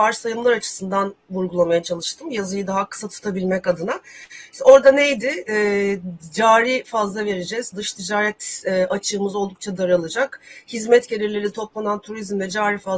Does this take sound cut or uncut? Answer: uncut